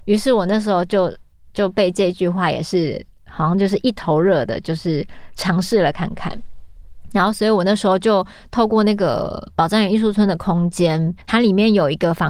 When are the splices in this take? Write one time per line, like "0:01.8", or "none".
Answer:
0:11.2